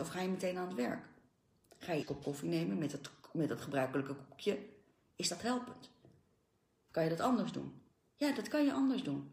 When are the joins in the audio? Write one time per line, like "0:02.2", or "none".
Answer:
0:02.0